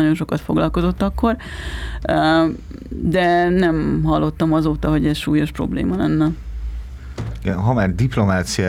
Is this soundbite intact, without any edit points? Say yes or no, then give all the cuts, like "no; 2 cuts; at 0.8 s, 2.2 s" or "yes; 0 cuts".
yes; 0 cuts